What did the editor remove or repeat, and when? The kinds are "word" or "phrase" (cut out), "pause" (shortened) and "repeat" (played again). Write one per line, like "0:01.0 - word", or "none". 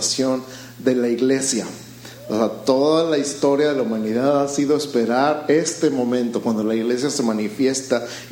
none